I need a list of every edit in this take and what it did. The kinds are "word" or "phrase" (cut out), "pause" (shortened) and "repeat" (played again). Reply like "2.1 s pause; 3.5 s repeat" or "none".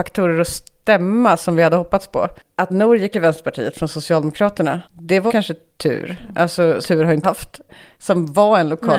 2.7 s word; 3.1 s word; 4.8 s pause; 5.3 s word; 6.8 s word; 7.2 s word